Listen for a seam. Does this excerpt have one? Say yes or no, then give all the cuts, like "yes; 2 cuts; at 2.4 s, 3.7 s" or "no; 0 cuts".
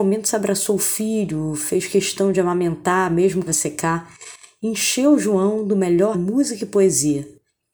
yes; 2 cuts; at 3.5 s, 6.1 s